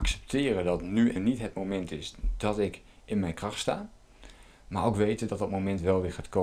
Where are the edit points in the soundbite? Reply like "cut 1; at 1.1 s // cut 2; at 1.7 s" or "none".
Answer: cut 1; at 1.2 s

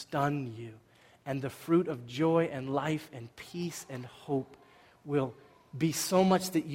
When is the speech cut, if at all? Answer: none

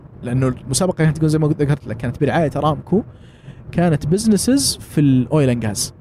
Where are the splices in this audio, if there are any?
none

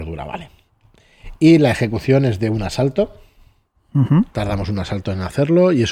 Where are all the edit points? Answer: cut 1; at 4.3 s

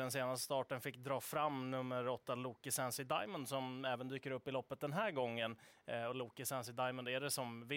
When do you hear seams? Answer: none

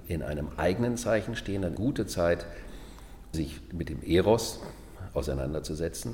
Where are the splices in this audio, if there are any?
cut 1; at 1.8 s // cut 2; at 3.3 s

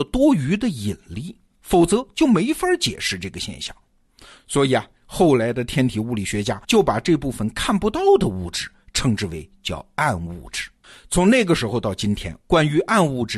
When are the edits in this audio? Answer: cut 1; at 6.6 s // cut 2; at 10.8 s

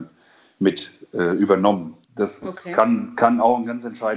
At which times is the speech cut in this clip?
cut 1; at 2.0 s

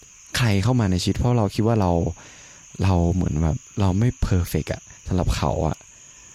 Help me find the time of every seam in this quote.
cut 1; at 4.2 s // cut 2; at 5.0 s

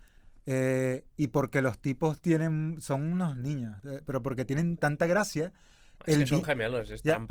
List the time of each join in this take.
cut 1; at 4.8 s

